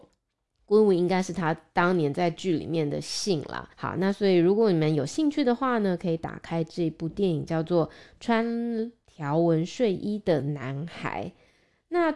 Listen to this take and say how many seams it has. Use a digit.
1